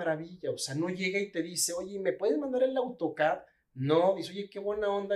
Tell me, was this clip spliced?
no; 0 cuts

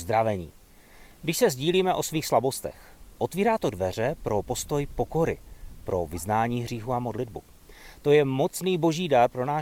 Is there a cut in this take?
no; 0 cuts

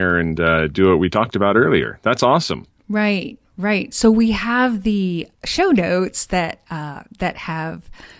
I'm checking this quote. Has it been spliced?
yes; 1 cut; at 5.3 s

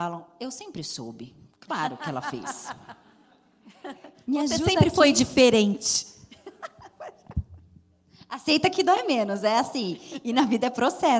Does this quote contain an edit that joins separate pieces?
no; 0 cuts

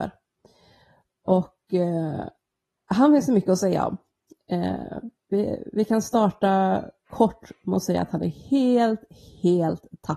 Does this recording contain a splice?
no; 0 cuts

